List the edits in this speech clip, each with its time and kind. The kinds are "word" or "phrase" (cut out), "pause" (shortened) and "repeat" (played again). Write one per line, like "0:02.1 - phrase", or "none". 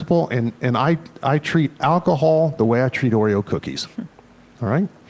none